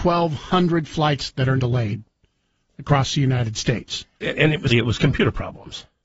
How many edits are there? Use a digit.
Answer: 3